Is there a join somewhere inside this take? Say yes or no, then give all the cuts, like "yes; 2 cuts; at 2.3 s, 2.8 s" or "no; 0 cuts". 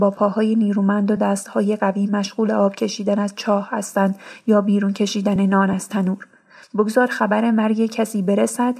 no; 0 cuts